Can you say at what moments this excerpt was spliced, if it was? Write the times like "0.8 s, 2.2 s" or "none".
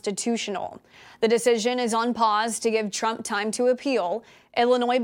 none